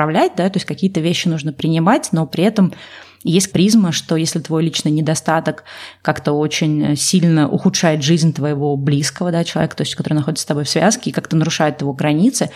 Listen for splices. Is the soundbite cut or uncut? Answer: cut